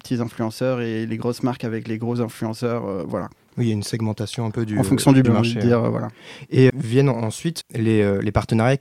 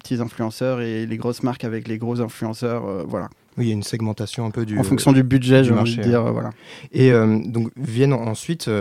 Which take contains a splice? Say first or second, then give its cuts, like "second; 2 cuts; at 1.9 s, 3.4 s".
first; 3 cuts; at 5.2 s, 6.7 s, 7.6 s